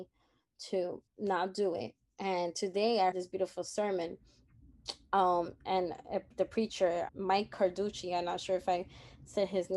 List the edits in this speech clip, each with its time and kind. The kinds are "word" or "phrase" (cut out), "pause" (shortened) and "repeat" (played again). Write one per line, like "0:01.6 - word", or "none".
0:01.1 - pause
0:03.1 - word
0:07.1 - word